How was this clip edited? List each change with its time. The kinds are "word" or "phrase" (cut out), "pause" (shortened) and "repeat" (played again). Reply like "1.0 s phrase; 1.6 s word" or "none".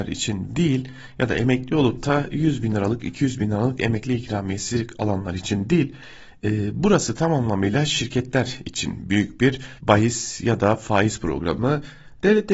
9.8 s pause